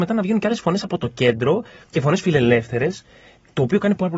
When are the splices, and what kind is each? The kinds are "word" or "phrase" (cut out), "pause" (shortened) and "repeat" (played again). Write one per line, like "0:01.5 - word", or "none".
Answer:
none